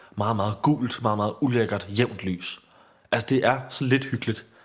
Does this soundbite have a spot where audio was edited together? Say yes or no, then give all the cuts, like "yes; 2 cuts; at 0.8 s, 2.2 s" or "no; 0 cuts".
no; 0 cuts